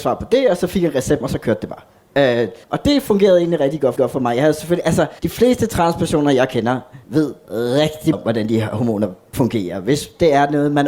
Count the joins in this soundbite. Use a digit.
5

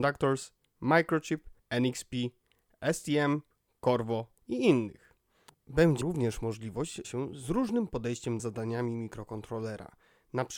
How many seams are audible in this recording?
5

